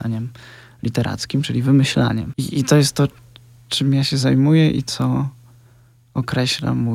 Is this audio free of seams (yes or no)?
yes